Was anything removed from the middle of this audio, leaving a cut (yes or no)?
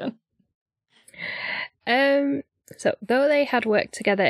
no